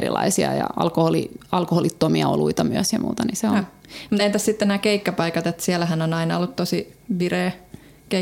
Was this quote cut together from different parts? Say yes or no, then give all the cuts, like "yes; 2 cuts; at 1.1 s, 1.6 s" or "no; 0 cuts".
no; 0 cuts